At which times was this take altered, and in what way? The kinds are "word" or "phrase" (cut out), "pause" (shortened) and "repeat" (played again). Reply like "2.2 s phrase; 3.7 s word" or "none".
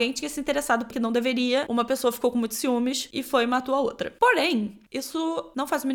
0.9 s word